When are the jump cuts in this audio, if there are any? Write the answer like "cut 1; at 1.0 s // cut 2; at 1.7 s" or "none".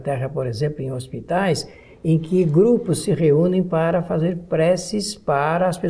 none